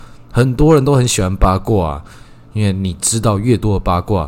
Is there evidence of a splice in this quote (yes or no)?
no